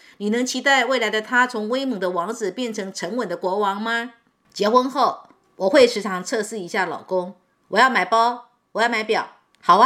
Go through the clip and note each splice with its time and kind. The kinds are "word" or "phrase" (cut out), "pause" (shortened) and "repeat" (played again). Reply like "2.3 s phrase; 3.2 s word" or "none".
none